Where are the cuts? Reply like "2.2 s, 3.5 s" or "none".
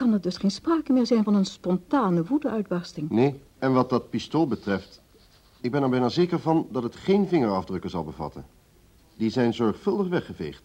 3.5 s